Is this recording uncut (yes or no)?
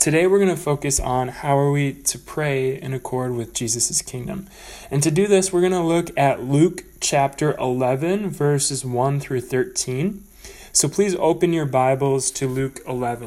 yes